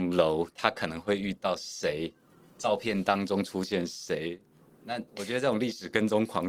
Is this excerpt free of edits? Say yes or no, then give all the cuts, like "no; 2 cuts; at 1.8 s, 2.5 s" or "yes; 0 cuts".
no; 1 cut; at 5.1 s